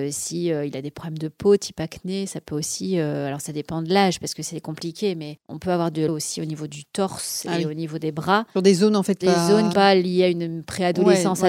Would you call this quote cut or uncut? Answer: cut